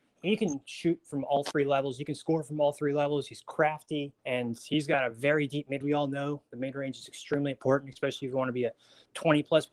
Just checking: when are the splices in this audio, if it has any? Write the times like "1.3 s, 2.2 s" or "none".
4.2 s, 5.8 s